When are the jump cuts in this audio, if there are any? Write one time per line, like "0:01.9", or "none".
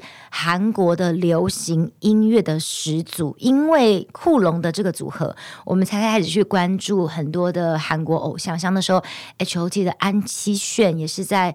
none